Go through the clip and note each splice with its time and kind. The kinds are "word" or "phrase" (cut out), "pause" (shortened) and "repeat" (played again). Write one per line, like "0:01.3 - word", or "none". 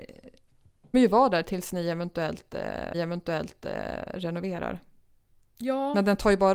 0:00.9 - phrase
0:02.9 - repeat